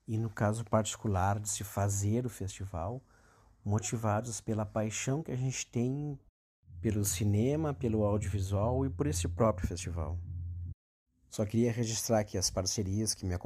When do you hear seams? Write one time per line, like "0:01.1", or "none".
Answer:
none

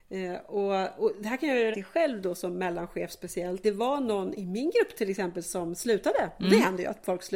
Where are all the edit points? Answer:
0:01.7
0:03.6
0:05.4

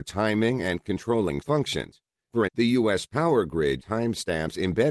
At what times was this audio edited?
0:01.4
0:02.5
0:03.8

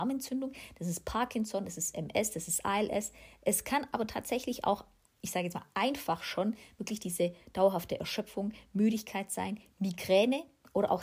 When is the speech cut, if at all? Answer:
none

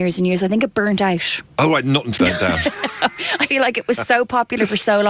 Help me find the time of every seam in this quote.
0:01.5
0:02.2
0:03.5

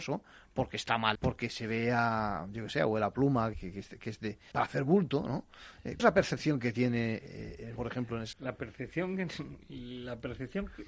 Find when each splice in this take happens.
0:01.1
0:03.5
0:04.5
0:06.0
0:07.8
0:08.3

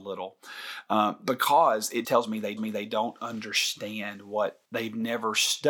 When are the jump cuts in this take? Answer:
0:02.0
0:02.6
0:04.7

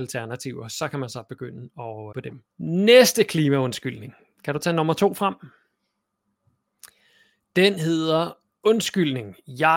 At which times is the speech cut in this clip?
0:02.1
0:02.5

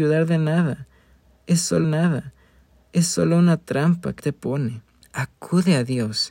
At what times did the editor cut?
0:01.8
0:04.2
0:05.0

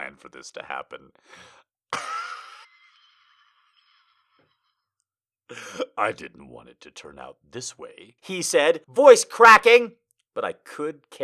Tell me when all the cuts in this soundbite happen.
0:02.6
0:08.2
0:08.8

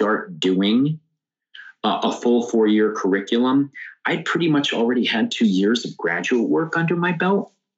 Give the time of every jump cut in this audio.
none

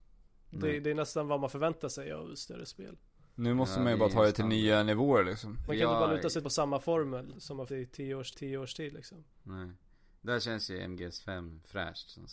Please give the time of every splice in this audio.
0:05.7
0:06.4
0:07.3
0:07.7
0:08.3
0:09.3

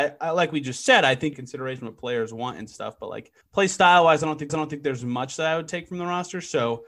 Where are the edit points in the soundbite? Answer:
0:01.3
0:03.4
0:04.5

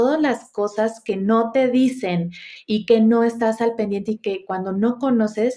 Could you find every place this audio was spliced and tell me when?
none

